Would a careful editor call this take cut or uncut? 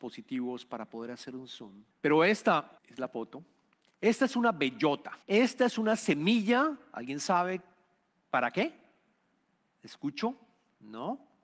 cut